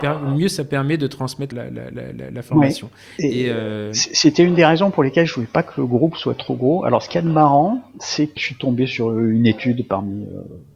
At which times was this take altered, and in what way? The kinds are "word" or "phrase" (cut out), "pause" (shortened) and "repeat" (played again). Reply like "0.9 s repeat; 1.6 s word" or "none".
1.5 s word; 8.4 s word